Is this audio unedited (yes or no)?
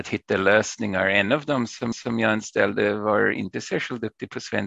no